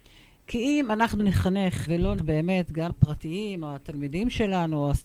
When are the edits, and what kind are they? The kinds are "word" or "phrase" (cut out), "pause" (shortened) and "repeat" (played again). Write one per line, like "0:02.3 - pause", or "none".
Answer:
0:01.2 - word
0:01.9 - word
0:02.2 - word
0:02.9 - phrase